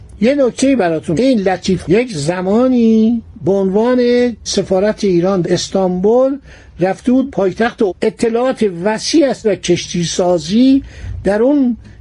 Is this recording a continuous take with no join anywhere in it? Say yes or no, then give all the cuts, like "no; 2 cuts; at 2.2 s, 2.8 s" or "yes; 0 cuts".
no; 7 cuts; at 1.1 s, 1.8 s, 4.5 s, 5.4 s, 7.3 s, 7.9 s, 9.4 s